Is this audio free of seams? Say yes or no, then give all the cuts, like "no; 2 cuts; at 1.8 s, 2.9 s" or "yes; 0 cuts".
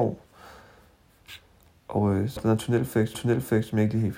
no; 2 cuts; at 2.4 s, 3.1 s